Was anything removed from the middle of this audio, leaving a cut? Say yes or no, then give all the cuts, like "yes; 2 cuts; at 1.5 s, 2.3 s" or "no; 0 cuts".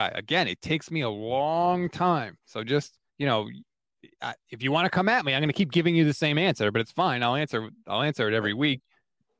yes; 1 cut; at 3.1 s